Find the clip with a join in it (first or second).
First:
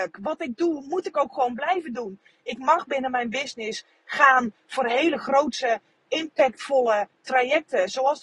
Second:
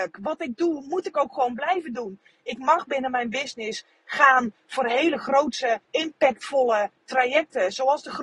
second